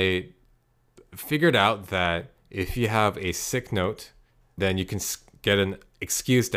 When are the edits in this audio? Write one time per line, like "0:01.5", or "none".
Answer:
0:04.6

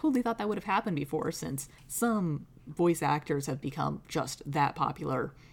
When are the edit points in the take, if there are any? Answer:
0:01.8

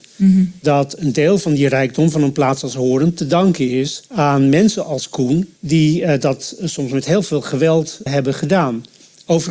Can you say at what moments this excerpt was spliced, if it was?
0:04.1
0:05.6
0:08.1

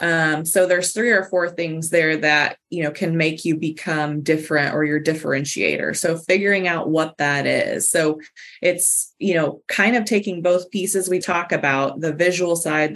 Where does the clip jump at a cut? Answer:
0:11.2

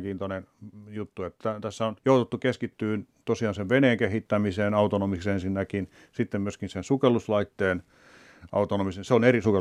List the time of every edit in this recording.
0:02.0

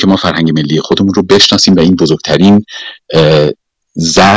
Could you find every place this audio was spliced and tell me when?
none

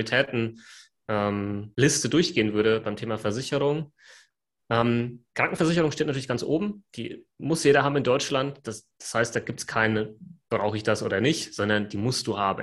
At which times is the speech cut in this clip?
0:05.3

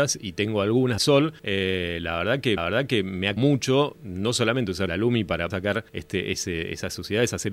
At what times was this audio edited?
0:01.0
0:01.4
0:02.6
0:03.4
0:04.9
0:05.5
0:05.9

